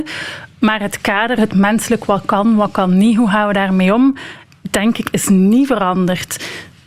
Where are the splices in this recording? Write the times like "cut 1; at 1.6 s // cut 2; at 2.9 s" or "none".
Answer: none